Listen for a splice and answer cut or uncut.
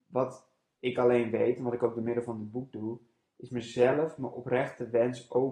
uncut